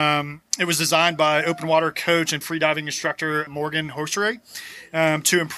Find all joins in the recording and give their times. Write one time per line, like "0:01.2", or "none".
0:02.4
0:03.5